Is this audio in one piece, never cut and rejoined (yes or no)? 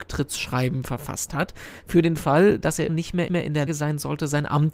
no